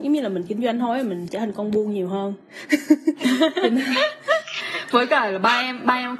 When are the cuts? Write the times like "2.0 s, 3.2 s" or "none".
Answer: 1.3 s